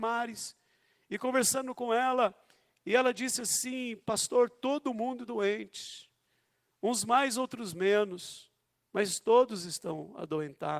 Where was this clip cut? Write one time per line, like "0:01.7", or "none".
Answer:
0:05.2

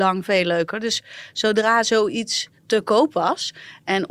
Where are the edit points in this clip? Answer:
none

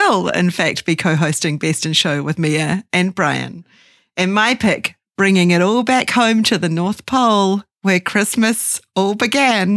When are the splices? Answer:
none

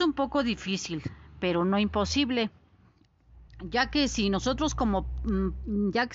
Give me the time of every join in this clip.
0:03.5

